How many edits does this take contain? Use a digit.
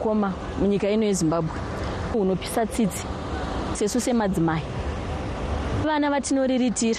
3